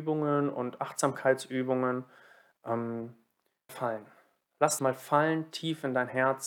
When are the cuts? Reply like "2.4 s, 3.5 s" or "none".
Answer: 3.7 s, 4.8 s